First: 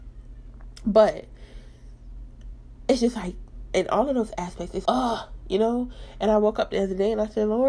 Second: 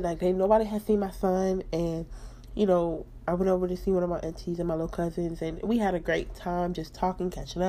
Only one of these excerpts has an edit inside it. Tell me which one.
first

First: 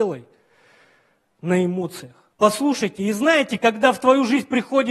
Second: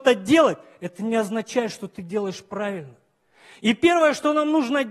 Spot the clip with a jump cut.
first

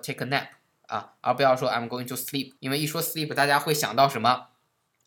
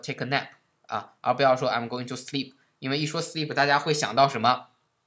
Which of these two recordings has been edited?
first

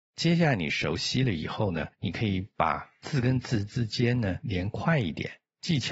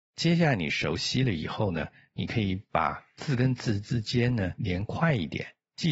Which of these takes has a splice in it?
first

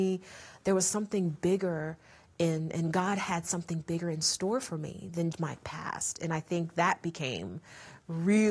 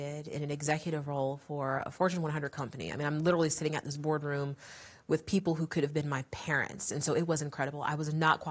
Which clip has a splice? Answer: first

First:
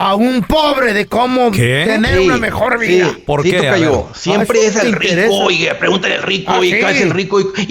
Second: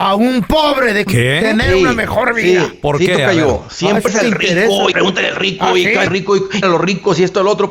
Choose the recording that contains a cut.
second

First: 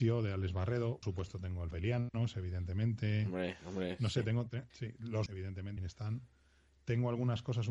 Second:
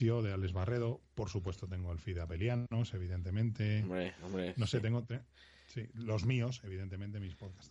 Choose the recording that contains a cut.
first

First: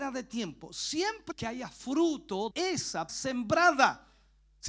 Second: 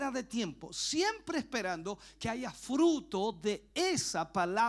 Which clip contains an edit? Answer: first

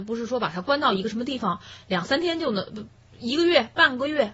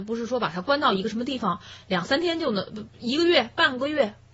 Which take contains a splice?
second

